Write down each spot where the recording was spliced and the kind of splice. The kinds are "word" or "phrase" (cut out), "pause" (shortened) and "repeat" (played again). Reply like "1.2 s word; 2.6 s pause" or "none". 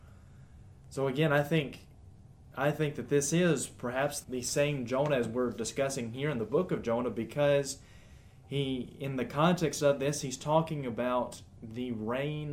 4.2 s word